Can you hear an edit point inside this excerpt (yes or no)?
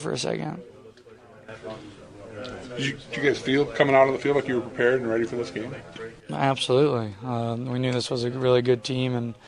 no